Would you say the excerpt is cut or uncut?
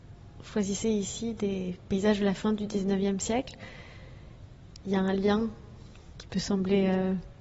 uncut